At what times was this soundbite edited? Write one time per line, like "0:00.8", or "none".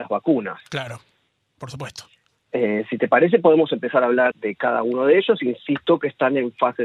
0:04.3

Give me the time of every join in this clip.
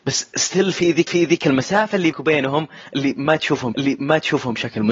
0:01.1
0:02.1
0:03.7

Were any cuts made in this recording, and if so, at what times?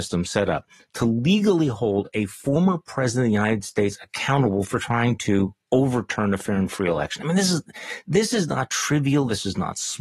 0:05.6

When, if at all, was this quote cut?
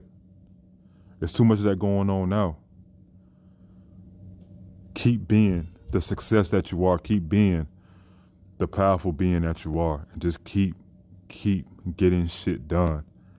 none

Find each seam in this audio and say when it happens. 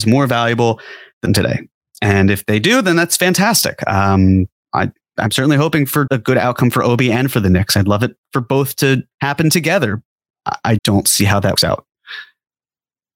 0:01.3
0:05.0
0:06.1
0:09.1
0:10.8
0:11.6

